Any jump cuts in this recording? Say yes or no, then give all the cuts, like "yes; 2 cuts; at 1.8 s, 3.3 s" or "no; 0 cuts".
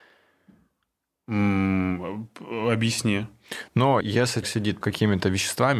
yes; 3 cuts; at 4.0 s, 4.4 s, 4.8 s